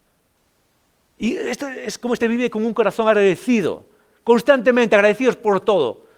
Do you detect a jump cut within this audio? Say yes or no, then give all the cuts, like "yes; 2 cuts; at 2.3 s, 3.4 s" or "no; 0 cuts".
yes; 1 cut; at 2.2 s